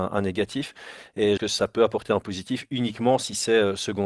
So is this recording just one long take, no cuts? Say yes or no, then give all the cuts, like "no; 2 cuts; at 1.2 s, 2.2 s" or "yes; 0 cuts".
no; 1 cut; at 1.4 s